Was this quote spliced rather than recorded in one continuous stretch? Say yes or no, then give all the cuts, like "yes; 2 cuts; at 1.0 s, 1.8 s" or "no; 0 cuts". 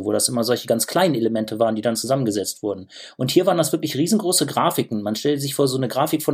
no; 0 cuts